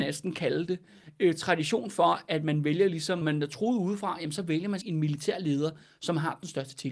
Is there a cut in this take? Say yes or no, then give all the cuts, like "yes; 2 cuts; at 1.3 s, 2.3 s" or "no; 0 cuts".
yes; 2 cuts; at 3.2 s, 4.8 s